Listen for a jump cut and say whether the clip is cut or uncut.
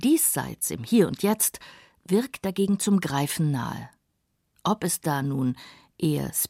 uncut